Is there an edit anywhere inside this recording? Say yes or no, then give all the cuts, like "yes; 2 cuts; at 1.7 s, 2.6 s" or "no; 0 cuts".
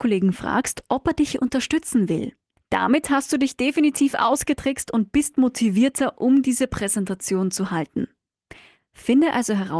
no; 0 cuts